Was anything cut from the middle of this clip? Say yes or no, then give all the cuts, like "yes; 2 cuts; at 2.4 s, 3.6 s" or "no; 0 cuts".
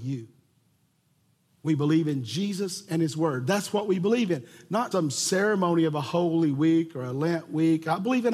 yes; 1 cut; at 4.9 s